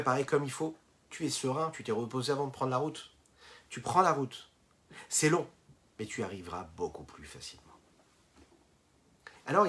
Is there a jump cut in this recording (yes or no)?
no